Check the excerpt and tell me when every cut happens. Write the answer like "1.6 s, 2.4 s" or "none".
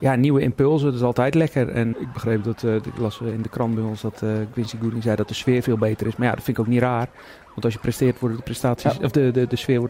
1.9 s